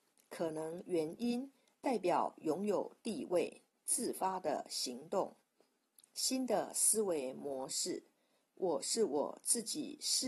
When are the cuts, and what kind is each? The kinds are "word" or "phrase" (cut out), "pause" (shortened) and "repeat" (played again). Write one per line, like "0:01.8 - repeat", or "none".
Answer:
none